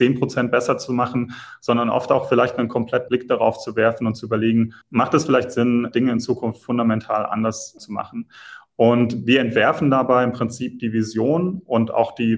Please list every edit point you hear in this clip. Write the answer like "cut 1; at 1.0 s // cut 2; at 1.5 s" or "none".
cut 1; at 3.1 s // cut 2; at 4.8 s // cut 3; at 5.9 s // cut 4; at 7.8 s